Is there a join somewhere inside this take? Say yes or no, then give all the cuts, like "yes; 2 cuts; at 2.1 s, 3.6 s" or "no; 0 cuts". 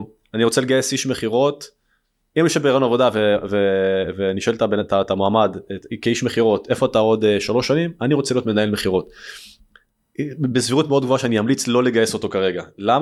no; 0 cuts